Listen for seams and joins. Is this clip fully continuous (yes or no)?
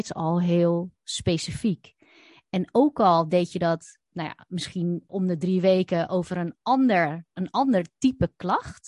no